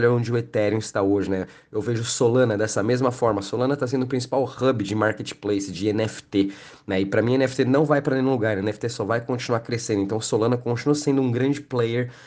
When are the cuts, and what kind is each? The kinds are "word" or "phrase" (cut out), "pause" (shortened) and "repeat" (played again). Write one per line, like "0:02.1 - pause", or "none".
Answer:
none